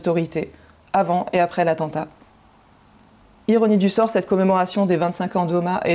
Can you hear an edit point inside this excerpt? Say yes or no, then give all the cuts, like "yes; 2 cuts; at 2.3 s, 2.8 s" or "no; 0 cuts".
no; 0 cuts